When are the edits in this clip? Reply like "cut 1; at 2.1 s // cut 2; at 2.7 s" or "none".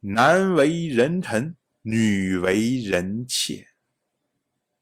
cut 1; at 1.7 s